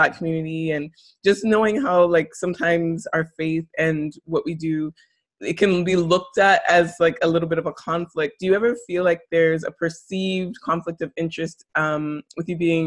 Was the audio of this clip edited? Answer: no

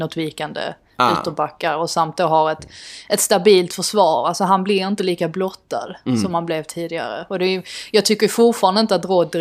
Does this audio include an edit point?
no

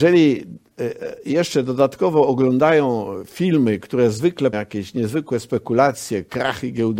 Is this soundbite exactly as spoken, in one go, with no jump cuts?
no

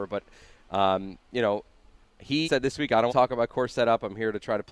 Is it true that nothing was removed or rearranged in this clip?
no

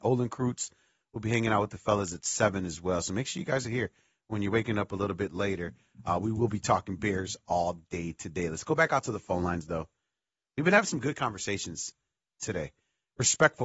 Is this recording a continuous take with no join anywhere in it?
yes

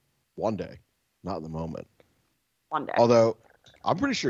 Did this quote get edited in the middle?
no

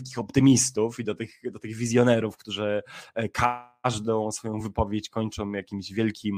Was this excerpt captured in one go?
yes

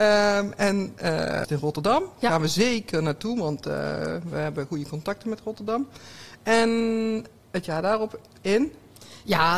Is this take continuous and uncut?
no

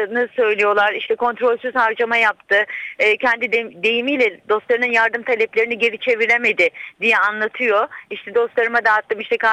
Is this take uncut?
yes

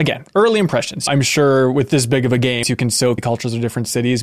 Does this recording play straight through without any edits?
no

